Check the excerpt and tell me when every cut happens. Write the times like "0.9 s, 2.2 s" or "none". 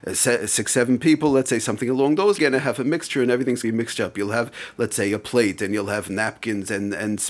2.4 s, 3.6 s